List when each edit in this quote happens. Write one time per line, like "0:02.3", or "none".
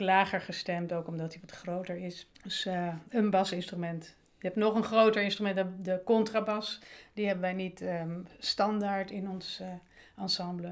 0:02.3